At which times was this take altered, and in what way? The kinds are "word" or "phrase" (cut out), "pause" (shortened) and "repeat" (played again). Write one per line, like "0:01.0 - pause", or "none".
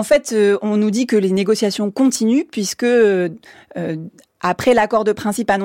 none